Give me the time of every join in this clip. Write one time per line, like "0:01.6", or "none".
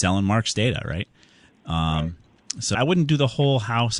0:02.7